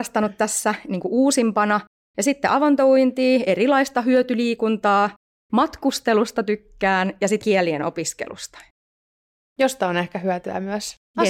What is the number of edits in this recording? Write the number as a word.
zero